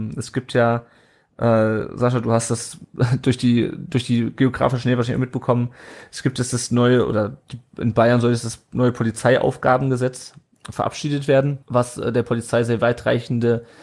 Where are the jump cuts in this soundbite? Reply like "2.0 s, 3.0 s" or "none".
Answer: 11.6 s